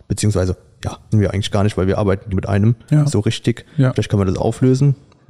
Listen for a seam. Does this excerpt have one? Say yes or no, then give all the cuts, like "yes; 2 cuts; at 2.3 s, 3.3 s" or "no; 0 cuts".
yes; 3 cuts; at 1.1 s, 2.3 s, 4.4 s